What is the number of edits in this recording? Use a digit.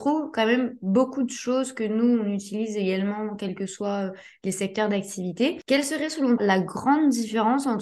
1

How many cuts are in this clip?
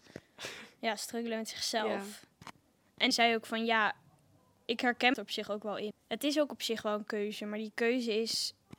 3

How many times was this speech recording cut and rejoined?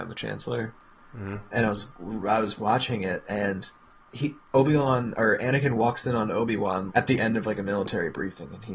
2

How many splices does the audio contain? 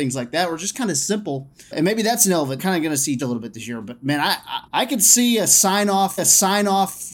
5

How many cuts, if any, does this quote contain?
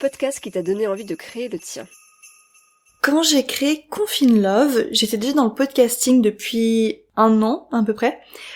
0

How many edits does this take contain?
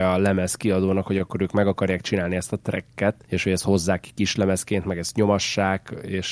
1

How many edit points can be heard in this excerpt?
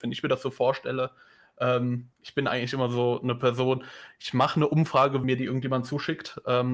2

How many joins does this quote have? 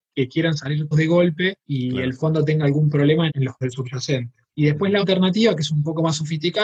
6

